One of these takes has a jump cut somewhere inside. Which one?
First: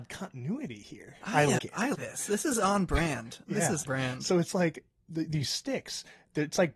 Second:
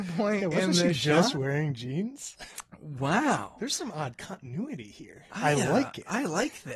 first; 3 cuts; at 1.6 s, 1.9 s, 3.9 s

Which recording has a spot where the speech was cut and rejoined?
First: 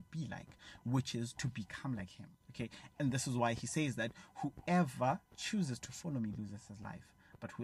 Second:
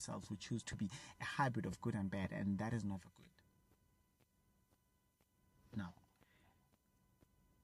first; 2 cuts; at 2.4 s, 5.3 s

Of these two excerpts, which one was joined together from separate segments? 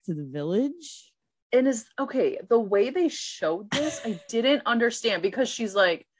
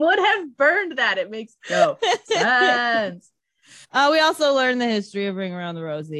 second; 2 cuts; at 1.6 s, 3.8 s

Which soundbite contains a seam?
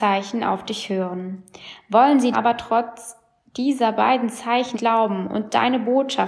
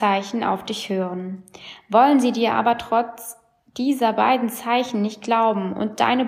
first; 2 cuts; at 2.3 s, 4.7 s

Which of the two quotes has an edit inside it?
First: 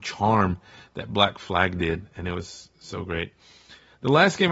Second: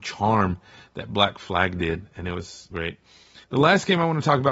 second; 2 cuts; at 2.7 s, 3.4 s

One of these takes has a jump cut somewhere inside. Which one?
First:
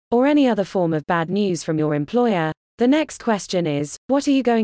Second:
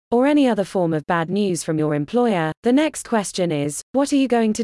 second; 1 cut; at 2.6 s

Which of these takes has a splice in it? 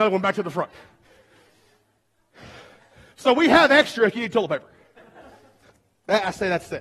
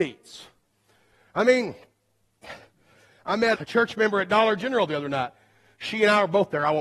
second; 1 cut; at 3.5 s

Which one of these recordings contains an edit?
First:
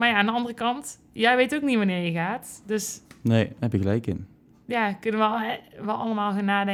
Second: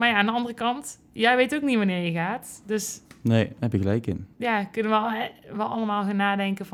second; 1 cut; at 4.3 s

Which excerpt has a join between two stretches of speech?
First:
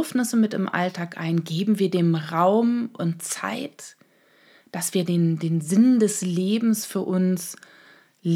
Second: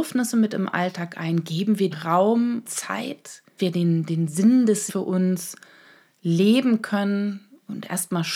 second; 4 cuts; at 1.9 s, 2.6 s, 3.6 s, 4.9 s

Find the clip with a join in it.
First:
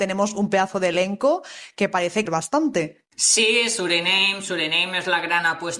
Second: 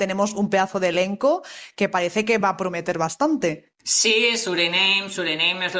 first; 1 cut; at 2.3 s

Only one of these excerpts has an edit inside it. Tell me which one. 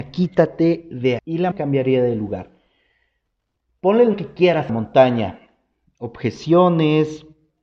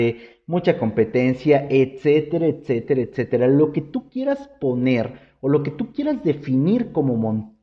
first; 4 cuts; at 1.2 s, 1.5 s, 4.1 s, 4.7 s

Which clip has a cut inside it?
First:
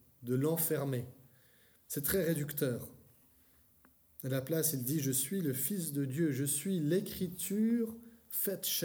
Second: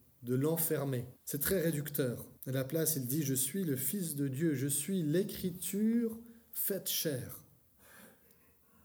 second; 2 cuts; at 1.2 s, 2.4 s

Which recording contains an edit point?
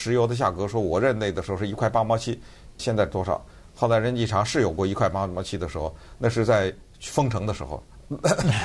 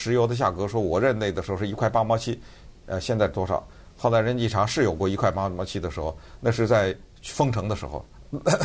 first; 1 cut; at 2.8 s

